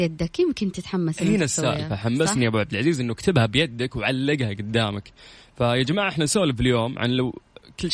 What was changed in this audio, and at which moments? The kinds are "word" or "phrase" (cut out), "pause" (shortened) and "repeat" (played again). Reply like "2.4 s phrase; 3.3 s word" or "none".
none